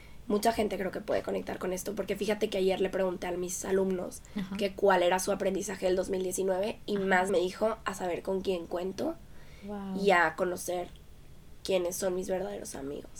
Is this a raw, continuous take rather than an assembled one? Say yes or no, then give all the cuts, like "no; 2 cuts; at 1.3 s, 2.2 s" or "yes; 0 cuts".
no; 1 cut; at 7.3 s